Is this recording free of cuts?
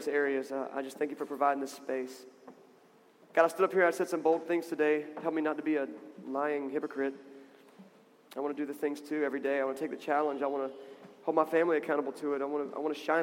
yes; 0 cuts

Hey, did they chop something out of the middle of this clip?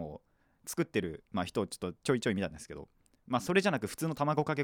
no; 0 cuts

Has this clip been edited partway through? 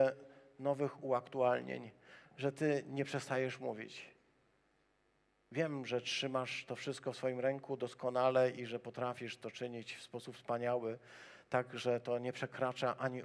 no; 0 cuts

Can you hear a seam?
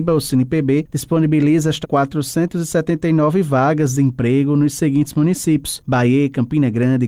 yes; 1 cut; at 1.8 s

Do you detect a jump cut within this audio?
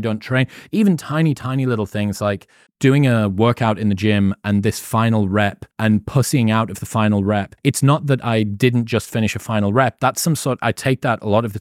yes; 3 cuts; at 2.7 s, 5.7 s, 7.6 s

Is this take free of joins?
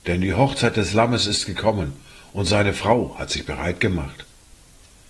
yes; 0 cuts

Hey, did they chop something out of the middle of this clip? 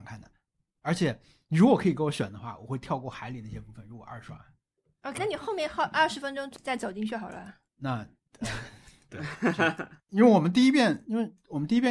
yes; 1 cut; at 5.2 s

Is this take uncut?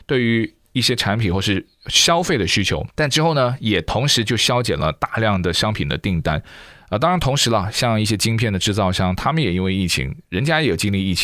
no; 1 cut; at 2.9 s

